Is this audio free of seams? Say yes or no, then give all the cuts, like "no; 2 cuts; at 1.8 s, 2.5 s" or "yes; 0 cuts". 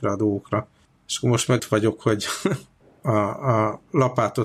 no; 1 cut; at 1.6 s